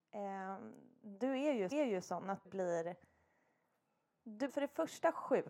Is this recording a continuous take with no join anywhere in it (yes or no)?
no